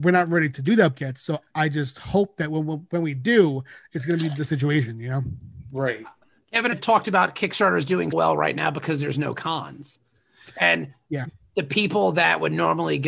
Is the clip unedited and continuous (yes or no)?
no